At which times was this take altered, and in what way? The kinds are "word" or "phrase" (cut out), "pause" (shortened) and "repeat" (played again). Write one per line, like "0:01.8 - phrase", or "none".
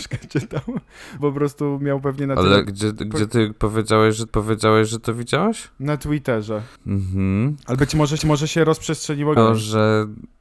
0:01.2 - word
0:02.6 - phrase
0:04.3 - repeat
0:06.8 - pause
0:08.2 - repeat
0:09.4 - phrase